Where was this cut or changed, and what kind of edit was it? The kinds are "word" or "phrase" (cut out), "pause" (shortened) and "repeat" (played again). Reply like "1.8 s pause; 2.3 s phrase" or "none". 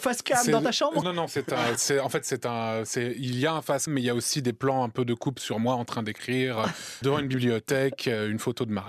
1.0 s word; 1.7 s word; 3.9 s word; 7.0 s word